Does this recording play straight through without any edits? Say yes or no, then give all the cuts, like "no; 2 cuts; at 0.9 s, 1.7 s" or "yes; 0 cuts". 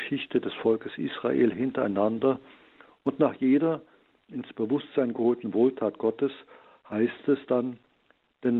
yes; 0 cuts